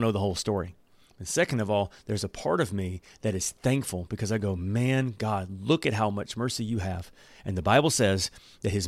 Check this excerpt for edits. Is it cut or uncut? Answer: uncut